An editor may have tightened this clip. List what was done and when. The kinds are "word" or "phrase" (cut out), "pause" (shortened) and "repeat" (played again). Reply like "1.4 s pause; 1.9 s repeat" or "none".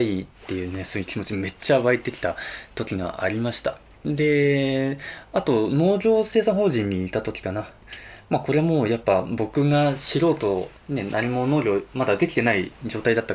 10.8 s pause